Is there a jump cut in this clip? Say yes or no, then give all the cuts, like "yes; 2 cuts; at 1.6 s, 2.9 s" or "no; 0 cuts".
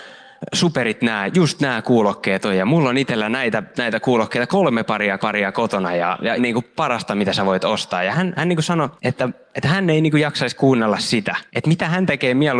yes; 6 cuts; at 3.7 s, 5.2 s, 6.4 s, 8.1 s, 9.0 s, 11.5 s